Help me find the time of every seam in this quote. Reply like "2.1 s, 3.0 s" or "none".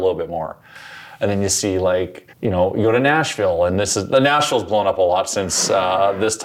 2.3 s